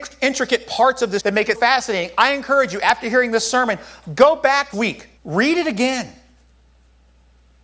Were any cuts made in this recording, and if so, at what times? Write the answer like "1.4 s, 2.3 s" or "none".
1.2 s, 1.5 s, 4.7 s, 5.2 s